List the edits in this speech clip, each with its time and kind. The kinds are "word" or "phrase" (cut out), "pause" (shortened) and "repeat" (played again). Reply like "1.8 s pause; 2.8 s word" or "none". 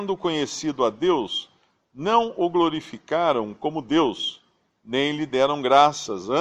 none